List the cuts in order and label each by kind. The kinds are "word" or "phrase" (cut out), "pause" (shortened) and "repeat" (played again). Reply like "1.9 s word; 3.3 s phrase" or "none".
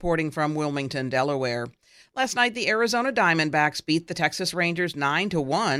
none